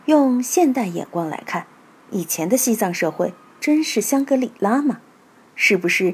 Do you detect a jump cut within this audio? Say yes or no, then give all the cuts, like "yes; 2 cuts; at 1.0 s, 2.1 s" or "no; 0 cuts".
no; 0 cuts